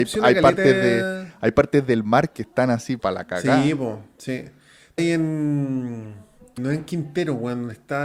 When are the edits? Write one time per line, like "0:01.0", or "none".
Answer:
0:03.0
0:05.0
0:06.6